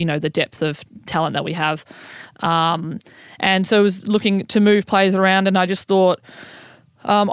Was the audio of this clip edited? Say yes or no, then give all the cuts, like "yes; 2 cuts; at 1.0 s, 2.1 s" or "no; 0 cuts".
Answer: no; 0 cuts